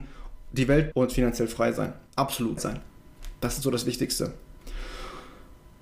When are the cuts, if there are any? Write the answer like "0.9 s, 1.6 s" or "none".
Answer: 0.9 s, 2.6 s